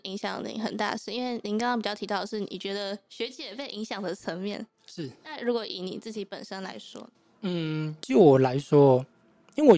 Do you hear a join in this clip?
yes; 1 cut; at 7.1 s

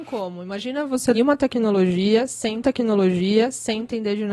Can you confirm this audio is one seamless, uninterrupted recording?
no; 2 cuts; at 1.1 s, 2.6 s

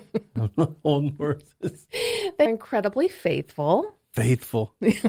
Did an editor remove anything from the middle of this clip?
yes; 1 cut; at 2.5 s

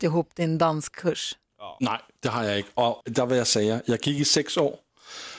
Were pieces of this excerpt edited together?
yes; 1 cut; at 3.0 s

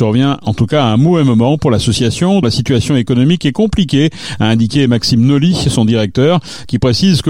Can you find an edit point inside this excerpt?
yes; 1 cut; at 2.4 s

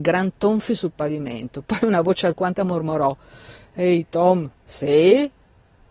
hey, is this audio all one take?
no; 2 cuts; at 2.6 s, 4.5 s

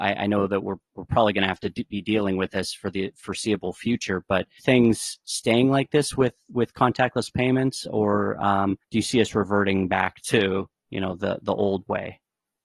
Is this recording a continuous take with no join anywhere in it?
no; 2 cuts; at 4.6 s, 8.8 s

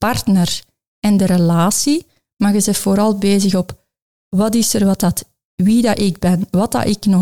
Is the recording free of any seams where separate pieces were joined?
yes; 0 cuts

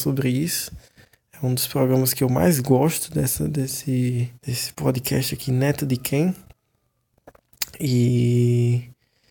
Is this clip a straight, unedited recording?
no; 1 cut; at 4.4 s

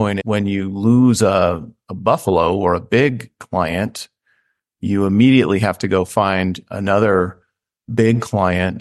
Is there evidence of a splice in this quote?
no; 0 cuts

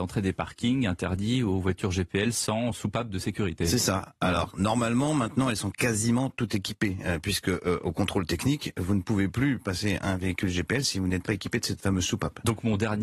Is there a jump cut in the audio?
yes; 1 cut; at 4.5 s

